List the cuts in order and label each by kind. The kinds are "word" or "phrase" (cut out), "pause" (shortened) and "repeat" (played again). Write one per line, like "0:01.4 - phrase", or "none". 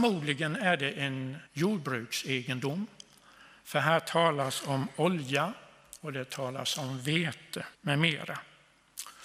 0:01.5 - pause
0:07.7 - pause